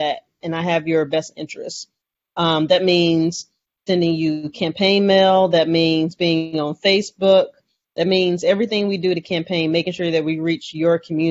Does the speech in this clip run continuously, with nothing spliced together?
yes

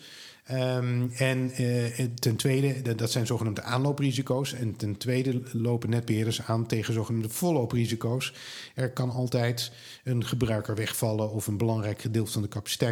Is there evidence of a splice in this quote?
no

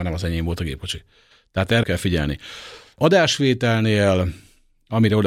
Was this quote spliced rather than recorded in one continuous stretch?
yes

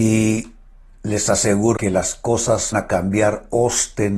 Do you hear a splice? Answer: yes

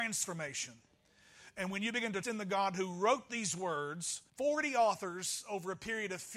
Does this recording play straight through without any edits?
no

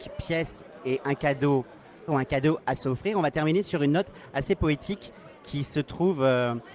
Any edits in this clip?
yes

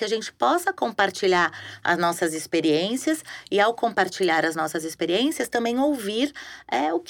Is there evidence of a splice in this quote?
no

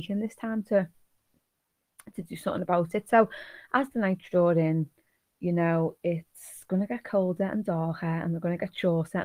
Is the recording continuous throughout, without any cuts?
yes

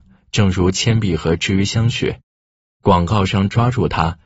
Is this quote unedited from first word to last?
yes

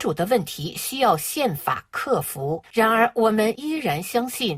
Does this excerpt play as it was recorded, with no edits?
no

